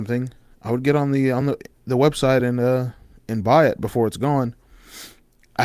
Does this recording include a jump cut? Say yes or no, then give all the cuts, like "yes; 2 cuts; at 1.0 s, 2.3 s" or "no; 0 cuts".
no; 0 cuts